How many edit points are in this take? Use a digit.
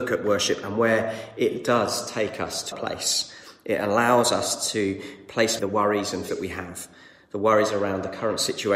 3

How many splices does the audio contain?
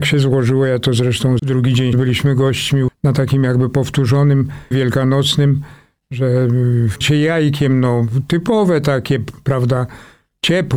5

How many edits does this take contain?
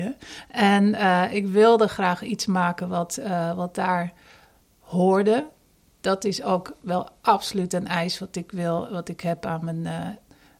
0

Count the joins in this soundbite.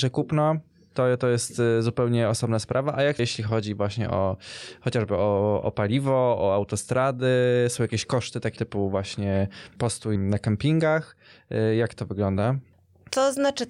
3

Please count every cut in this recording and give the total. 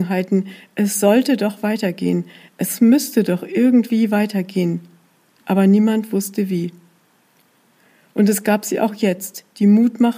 0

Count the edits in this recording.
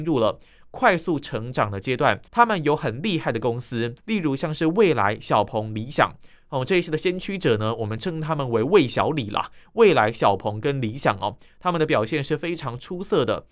2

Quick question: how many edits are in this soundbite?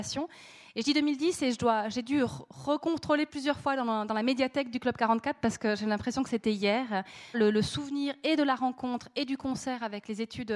1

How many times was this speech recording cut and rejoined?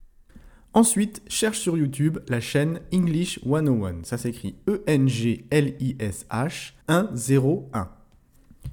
1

